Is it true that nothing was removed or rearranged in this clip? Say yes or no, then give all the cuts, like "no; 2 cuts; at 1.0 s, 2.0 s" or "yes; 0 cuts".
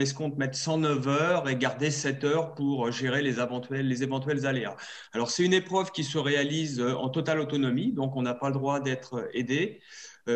yes; 0 cuts